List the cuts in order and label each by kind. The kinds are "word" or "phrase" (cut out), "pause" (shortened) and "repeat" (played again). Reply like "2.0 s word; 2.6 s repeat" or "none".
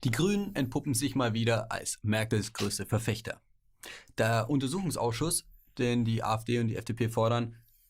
none